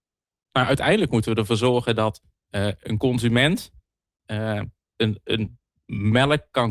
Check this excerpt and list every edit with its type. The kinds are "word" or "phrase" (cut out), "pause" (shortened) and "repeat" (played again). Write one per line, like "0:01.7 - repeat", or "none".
none